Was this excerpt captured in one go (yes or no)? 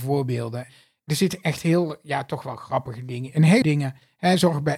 no